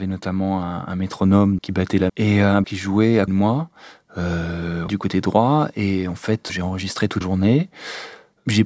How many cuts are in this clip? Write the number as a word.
seven